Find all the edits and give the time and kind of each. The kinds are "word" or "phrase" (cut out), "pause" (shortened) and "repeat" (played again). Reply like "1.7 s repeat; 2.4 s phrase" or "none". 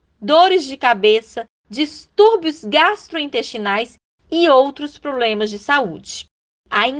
none